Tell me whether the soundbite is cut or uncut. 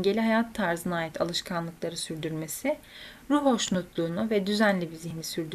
uncut